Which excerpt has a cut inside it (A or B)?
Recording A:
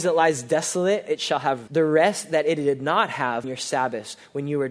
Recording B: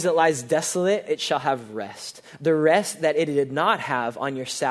A